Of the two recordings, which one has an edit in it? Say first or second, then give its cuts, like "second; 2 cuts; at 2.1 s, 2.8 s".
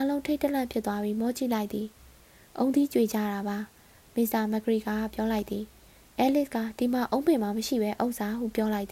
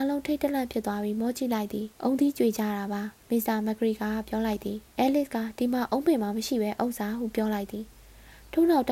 second; 3 cuts; at 1.9 s, 3.2 s, 4.9 s